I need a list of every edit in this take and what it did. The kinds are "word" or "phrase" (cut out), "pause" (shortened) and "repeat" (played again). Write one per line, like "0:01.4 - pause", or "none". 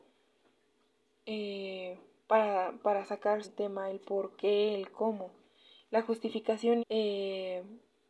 0:03.4 - word
0:06.8 - word